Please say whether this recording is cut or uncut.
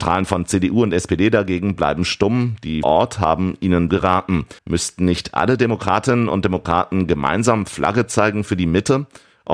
cut